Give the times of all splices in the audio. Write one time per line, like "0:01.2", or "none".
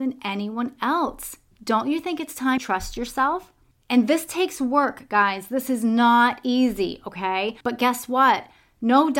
0:02.6
0:03.7
0:07.6

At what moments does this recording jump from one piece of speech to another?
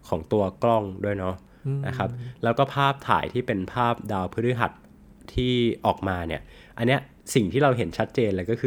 none

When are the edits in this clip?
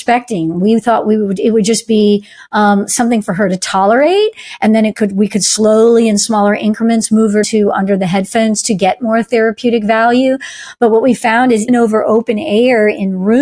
0:07.4
0:11.7

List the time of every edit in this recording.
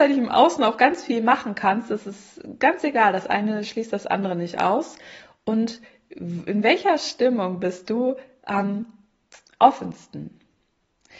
none

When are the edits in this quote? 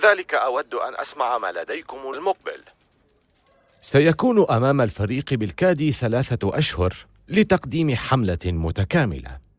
0:02.1

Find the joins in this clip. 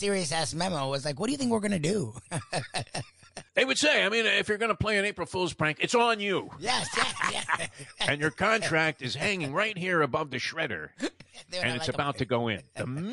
0:03.5

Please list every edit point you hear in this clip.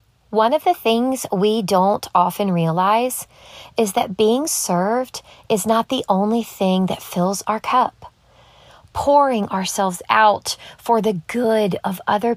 none

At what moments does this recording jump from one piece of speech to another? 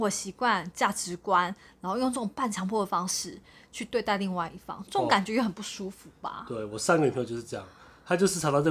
none

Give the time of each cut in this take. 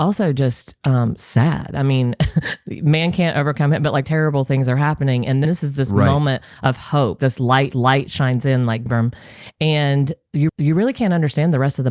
0:04.0
0:05.4
0:07.2
0:07.7
0:08.9
0:10.5

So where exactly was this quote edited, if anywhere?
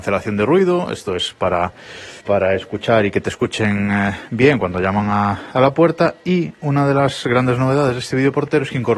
0:02.2

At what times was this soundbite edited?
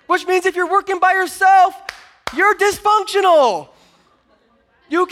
none

